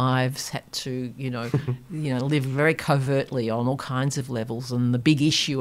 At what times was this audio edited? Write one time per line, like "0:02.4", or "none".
none